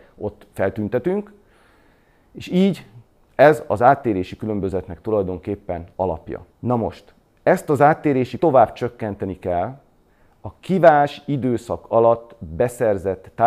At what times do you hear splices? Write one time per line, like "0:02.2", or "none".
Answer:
0:05.9
0:06.5
0:08.4

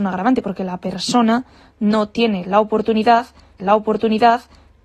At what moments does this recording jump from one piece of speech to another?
0:03.6

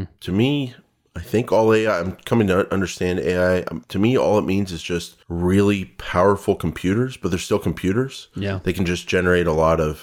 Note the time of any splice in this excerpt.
0:03.8
0:05.2

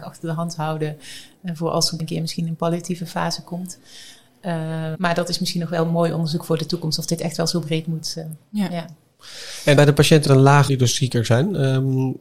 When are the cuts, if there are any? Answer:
0:02.0
0:04.9
0:09.8
0:10.3
0:10.7

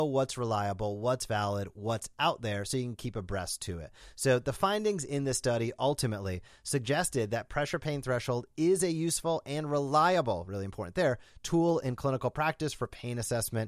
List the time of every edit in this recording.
none

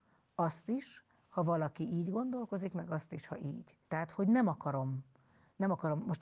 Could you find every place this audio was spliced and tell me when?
0:03.8

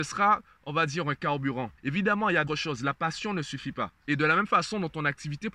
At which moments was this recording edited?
0:01.8
0:02.5

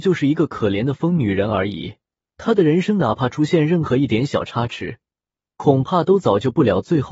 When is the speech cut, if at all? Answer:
0:02.2

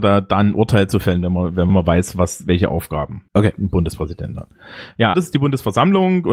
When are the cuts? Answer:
0:01.7
0:03.3
0:05.1

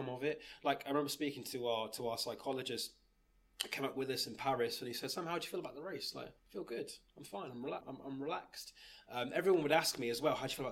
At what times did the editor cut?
0:06.4
0:07.8

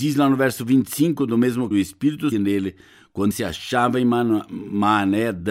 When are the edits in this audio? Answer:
0:01.7
0:02.3
0:03.3

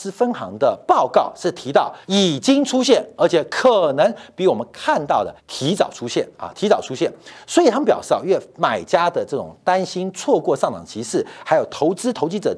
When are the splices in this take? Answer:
0:02.0
0:05.4

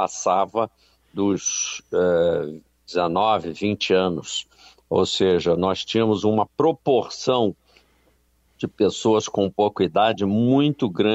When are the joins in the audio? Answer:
none

